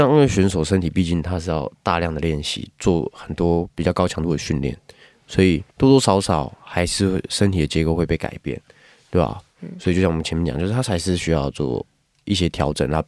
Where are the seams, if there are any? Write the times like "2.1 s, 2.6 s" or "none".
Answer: 5.7 s